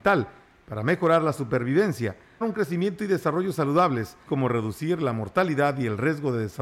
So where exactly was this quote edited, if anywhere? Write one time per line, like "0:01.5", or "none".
0:02.4
0:04.3